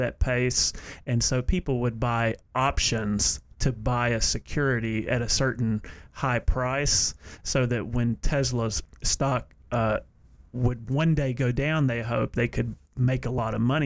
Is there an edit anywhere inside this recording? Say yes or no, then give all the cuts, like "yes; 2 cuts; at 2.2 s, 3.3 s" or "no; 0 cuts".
no; 0 cuts